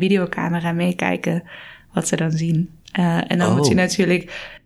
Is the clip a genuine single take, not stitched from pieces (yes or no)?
yes